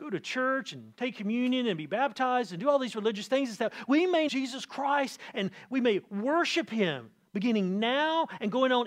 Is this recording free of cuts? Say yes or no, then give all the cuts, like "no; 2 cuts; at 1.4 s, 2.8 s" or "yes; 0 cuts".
no; 1 cut; at 4.3 s